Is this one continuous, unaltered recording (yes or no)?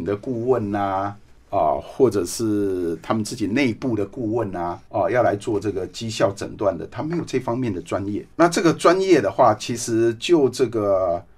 no